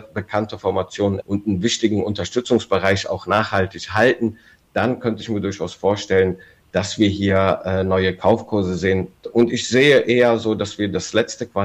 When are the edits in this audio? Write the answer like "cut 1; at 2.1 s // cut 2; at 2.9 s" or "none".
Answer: cut 1; at 1.2 s